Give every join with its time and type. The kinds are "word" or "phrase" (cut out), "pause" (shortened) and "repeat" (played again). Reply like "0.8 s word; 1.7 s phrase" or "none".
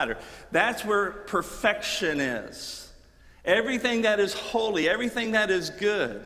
none